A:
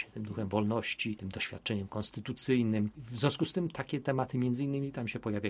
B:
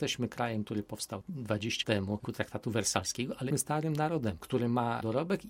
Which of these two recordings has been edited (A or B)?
B